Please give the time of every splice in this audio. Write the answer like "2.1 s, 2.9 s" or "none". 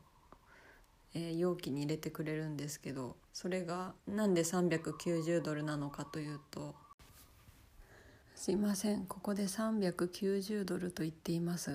3.2 s, 4.0 s, 8.2 s

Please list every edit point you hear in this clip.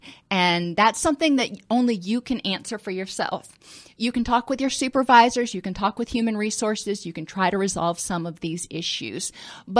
none

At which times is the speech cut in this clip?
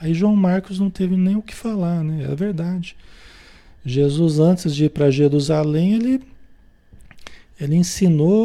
none

